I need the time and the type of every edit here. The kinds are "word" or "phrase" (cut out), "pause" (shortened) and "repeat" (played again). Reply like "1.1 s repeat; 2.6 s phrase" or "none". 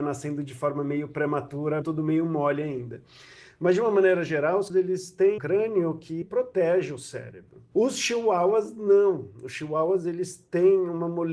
1.8 s word; 4.7 s word; 5.4 s word; 6.2 s word